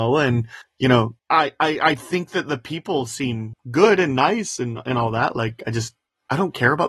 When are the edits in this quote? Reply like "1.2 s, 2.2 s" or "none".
1.2 s